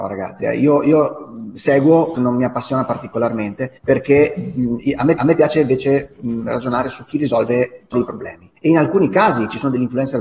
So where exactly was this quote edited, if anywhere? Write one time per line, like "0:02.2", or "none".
0:02.1
0:03.8
0:05.2
0:07.9
0:08.6